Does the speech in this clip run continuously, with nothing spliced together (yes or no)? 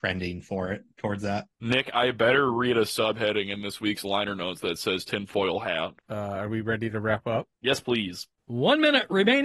no